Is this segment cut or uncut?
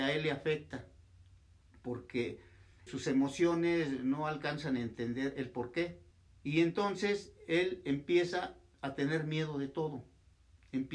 cut